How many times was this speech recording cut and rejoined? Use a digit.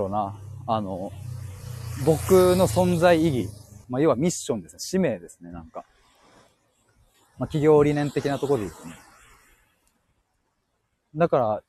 1